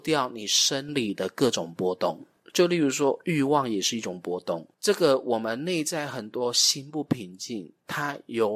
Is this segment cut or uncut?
cut